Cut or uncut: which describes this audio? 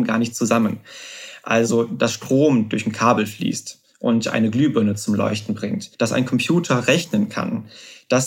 cut